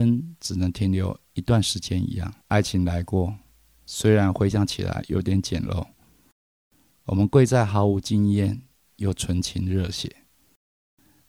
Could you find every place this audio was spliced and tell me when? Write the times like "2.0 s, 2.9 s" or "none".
2.4 s